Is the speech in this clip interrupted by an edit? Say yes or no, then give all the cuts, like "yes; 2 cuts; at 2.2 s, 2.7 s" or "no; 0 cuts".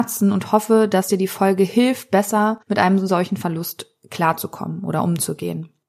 yes; 1 cut; at 2.6 s